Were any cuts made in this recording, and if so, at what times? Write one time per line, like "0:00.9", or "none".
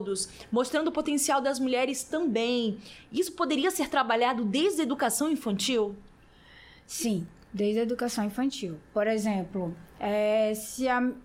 none